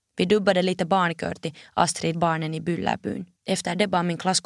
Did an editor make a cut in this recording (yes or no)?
yes